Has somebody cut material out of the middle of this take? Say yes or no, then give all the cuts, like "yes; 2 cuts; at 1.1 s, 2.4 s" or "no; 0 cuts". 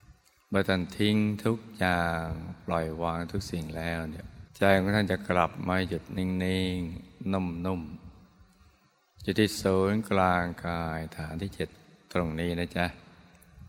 yes; 1 cut; at 4.5 s